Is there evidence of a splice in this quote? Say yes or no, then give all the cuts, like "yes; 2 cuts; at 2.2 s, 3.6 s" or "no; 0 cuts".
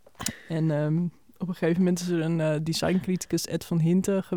no; 0 cuts